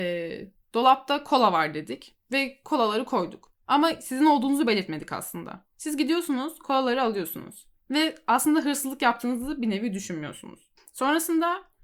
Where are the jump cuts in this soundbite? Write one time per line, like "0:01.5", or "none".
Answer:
none